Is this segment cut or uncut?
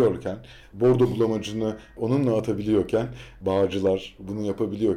uncut